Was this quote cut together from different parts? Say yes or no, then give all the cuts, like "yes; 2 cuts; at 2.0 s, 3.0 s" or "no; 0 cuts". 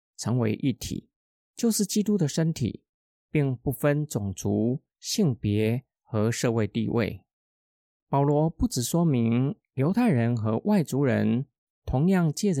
no; 0 cuts